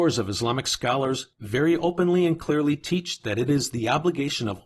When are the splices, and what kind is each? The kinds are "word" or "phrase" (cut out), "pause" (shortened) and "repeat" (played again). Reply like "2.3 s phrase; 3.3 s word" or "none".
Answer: none